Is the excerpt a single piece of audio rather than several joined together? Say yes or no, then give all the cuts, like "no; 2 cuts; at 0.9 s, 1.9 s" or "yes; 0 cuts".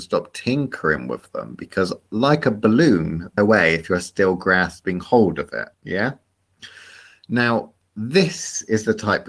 no; 2 cuts; at 3.4 s, 5.7 s